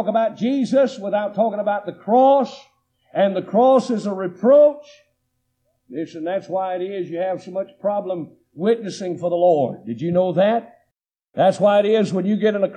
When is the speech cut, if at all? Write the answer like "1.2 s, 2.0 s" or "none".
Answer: none